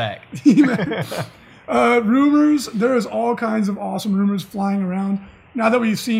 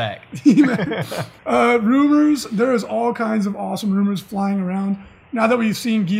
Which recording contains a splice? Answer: second; 1 cut; at 1.4 s

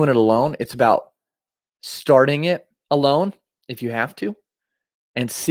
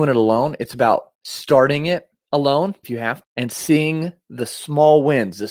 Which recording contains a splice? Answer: second; 3 cuts; at 1.1 s, 2.8 s, 3.2 s

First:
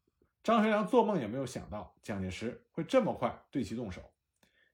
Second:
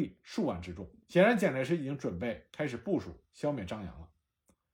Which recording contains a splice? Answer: second; 1 cut; at 1.0 s

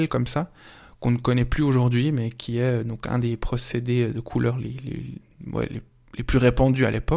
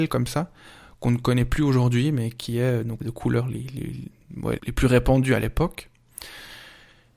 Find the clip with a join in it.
second; 2 cuts; at 3.0 s, 4.6 s

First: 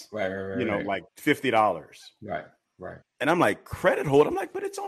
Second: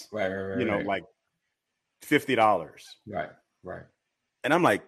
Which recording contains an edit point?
first; 2 cuts; at 1.1 s, 3.0 s

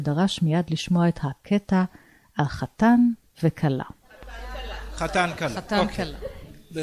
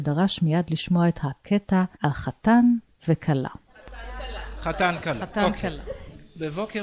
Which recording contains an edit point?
second; 1 cut; at 1.9 s

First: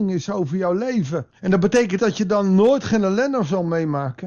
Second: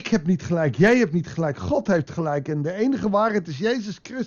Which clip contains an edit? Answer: first; 2 cuts; at 1.3 s, 2.0 s

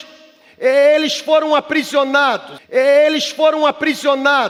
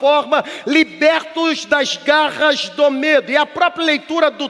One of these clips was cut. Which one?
first; 1 cut; at 2.6 s

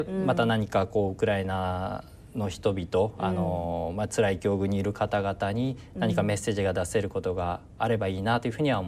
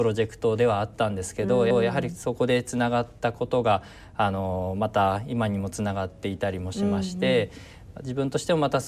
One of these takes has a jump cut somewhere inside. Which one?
second; 1 cut; at 1.7 s

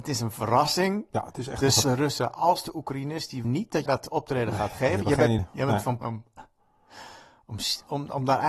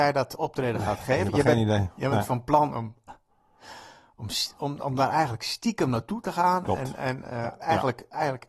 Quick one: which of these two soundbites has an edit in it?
first; 5 cuts; at 1.8 s, 3.4 s, 3.9 s, 5.4 s, 6.0 s

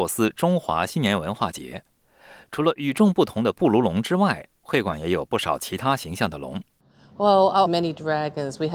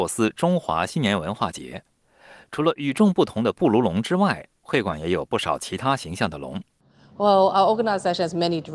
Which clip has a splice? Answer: first; 1 cut; at 7.7 s

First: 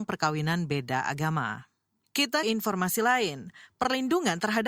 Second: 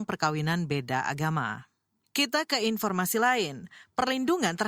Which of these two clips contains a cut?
first; 1 cut; at 2.4 s

